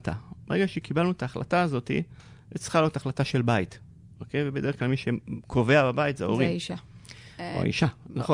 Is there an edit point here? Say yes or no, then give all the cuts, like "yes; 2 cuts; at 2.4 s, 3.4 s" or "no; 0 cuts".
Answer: no; 0 cuts